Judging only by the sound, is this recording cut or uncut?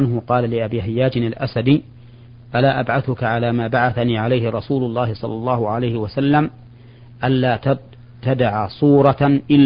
uncut